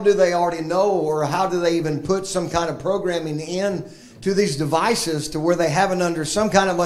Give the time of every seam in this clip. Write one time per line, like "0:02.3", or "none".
none